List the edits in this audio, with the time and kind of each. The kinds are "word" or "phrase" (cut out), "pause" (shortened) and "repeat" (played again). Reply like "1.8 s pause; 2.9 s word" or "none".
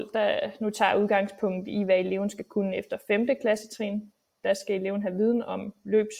none